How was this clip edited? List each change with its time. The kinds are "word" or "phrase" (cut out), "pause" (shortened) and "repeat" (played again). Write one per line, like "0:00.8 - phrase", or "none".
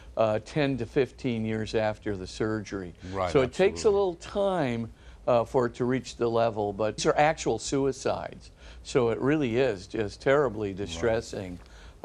0:07.0 - phrase